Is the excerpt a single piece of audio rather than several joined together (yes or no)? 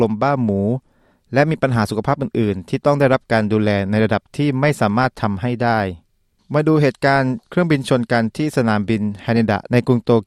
yes